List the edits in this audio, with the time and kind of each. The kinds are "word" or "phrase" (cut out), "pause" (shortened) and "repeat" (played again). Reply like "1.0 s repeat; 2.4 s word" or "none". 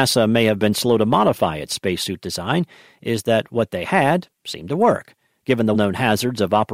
5.7 s word